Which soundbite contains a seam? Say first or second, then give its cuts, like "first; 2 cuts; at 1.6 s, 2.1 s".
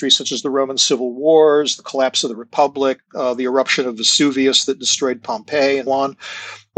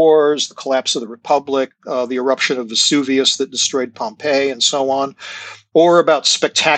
first; 1 cut; at 5.9 s